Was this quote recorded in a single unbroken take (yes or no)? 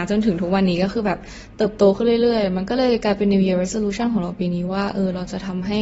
yes